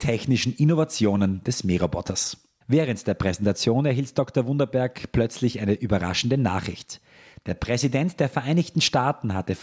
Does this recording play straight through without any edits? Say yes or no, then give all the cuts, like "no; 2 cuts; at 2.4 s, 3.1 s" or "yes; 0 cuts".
yes; 0 cuts